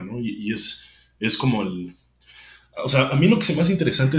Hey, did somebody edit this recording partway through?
no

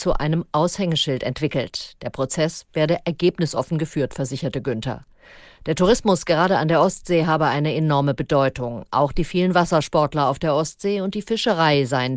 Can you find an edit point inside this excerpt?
no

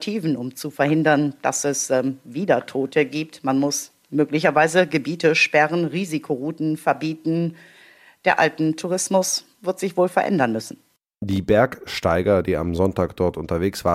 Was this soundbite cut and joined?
no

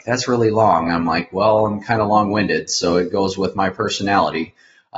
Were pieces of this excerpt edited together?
no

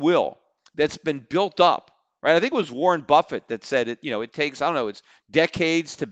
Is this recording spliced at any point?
no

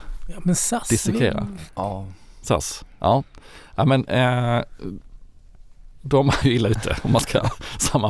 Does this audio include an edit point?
yes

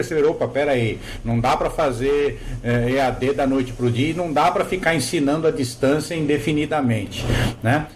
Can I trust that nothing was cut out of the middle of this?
yes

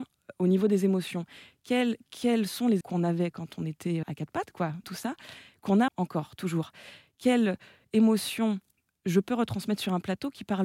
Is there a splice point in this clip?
yes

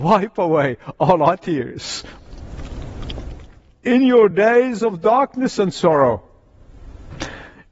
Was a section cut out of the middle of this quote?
no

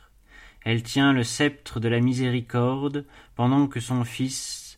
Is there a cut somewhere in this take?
no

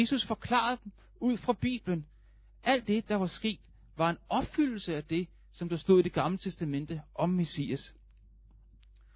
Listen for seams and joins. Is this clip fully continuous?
yes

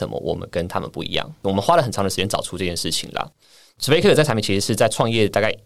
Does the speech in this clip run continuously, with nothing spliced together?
yes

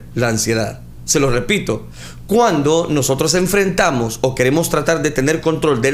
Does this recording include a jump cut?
no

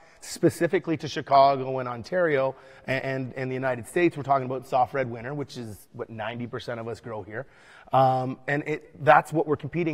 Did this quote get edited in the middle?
no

